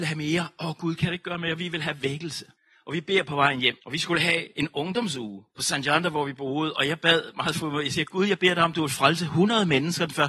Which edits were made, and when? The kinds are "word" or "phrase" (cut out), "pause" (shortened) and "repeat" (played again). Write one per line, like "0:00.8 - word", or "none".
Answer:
0:02.5 - pause
0:03.8 - pause
0:05.5 - pause